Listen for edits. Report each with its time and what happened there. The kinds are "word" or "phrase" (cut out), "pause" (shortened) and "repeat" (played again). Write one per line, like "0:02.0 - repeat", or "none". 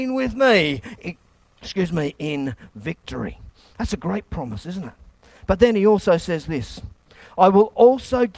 none